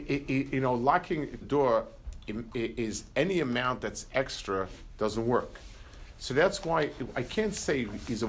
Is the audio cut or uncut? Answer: cut